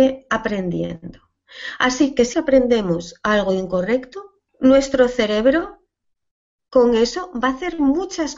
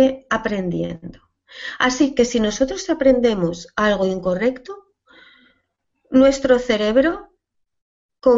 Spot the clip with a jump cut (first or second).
first